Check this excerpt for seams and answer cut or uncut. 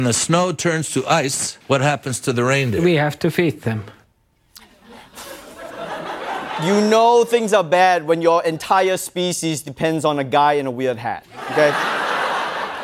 cut